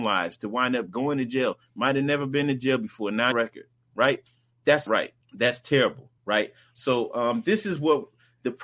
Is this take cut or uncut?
cut